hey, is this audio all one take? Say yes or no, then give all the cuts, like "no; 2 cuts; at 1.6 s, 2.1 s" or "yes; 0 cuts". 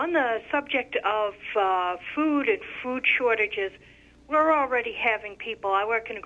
yes; 0 cuts